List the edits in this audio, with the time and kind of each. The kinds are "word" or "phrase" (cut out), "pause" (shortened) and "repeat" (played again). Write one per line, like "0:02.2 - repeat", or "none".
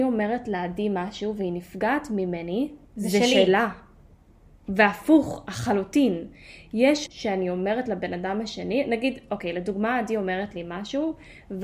0:02.8 - pause
0:07.1 - word